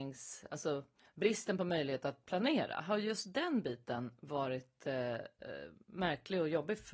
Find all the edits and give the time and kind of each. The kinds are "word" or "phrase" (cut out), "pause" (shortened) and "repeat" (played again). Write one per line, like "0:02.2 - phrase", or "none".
0:01.0 - pause

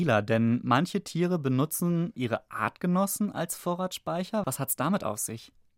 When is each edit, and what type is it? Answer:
0:02.1 - word

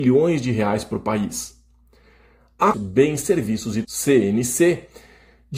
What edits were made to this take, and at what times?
0:02.7 - phrase
0:03.8 - word

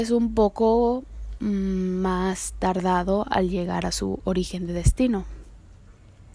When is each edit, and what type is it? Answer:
none

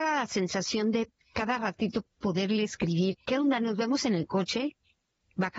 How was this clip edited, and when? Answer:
0:01.2 - pause
0:02.1 - pause

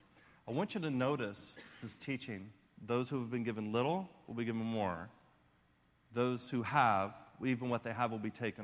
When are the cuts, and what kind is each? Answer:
0:01.8 - word

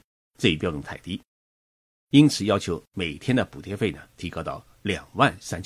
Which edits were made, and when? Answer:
none

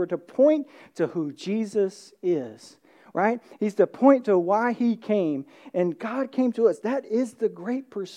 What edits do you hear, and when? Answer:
none

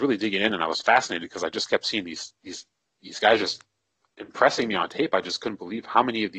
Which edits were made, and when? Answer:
0:02.4 - pause

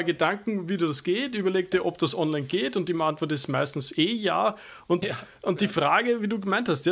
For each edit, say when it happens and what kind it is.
none

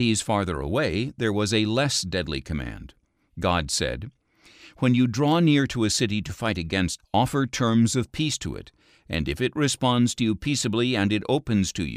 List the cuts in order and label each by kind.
0:07.0 - word

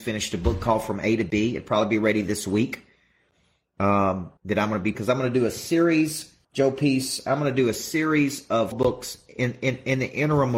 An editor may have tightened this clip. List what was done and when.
0:04.4 - pause
0:04.9 - word
0:06.4 - pause
0:08.7 - word

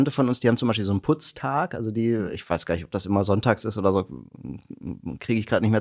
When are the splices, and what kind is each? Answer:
none

